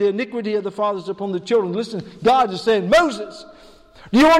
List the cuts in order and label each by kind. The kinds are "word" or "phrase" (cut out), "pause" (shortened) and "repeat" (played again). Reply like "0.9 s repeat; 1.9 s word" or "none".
none